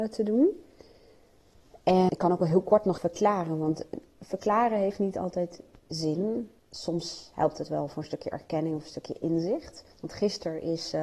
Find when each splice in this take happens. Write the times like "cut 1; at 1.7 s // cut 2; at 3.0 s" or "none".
cut 1; at 2.1 s // cut 2; at 3.0 s // cut 3; at 6.6 s // cut 4; at 9.9 s